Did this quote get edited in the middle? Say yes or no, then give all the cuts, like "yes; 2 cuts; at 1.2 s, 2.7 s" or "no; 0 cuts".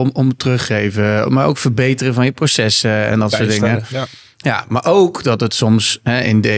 no; 0 cuts